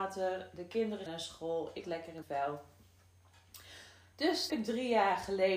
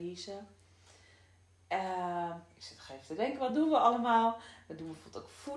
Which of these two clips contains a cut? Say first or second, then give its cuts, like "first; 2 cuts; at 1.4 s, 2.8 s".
first; 4 cuts; at 1.1 s, 1.8 s, 2.2 s, 4.5 s